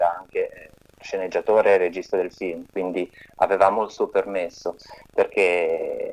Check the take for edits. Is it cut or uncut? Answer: uncut